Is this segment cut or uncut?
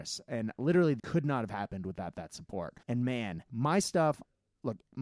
cut